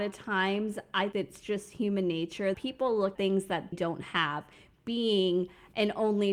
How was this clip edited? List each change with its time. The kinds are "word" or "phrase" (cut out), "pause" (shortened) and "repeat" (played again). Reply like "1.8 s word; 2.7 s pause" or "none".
1.1 s word; 2.5 s word; 3.1 s word; 3.7 s word